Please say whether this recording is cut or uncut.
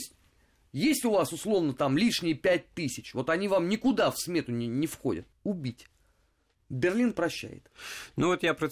cut